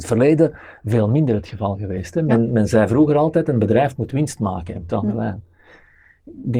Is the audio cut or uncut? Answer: cut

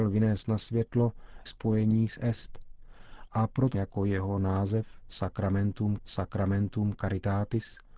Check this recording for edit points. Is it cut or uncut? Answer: cut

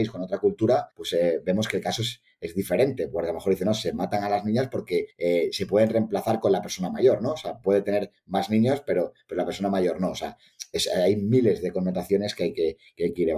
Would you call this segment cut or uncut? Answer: cut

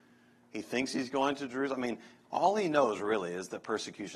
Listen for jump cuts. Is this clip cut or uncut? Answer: uncut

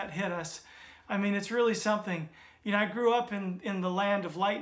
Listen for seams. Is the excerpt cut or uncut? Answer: uncut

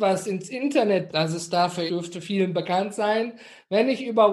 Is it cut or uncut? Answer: cut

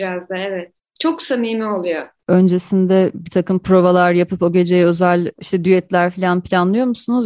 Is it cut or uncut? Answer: uncut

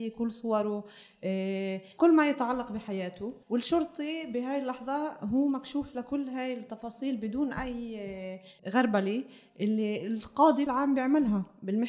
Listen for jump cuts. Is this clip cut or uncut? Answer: cut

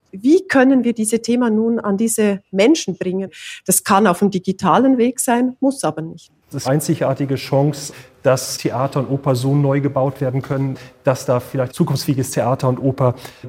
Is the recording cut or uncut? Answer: cut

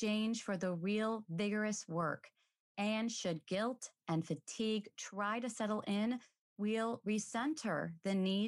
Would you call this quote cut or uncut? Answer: uncut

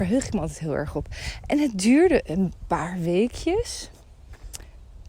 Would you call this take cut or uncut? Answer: uncut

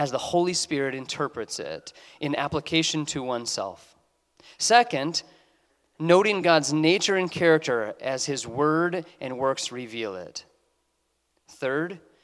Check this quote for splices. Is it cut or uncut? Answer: uncut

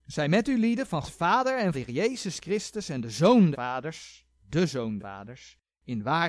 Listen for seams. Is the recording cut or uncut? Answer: cut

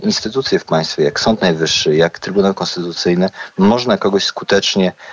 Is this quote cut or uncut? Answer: uncut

